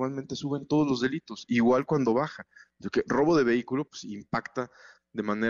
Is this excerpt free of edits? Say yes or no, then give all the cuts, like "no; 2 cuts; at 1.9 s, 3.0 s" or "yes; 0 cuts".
yes; 0 cuts